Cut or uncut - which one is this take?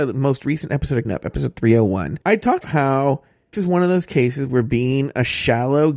cut